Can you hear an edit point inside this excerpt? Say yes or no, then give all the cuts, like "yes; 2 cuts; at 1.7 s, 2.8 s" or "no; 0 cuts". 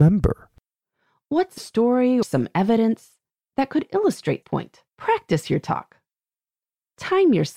yes; 4 cuts; at 1.6 s, 2.2 s, 4.4 s, 4.9 s